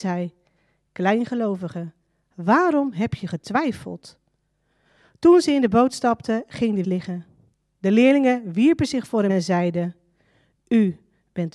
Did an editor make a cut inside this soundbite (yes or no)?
yes